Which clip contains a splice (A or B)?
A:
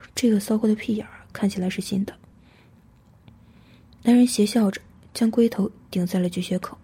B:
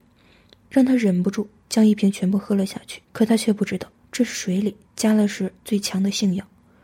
B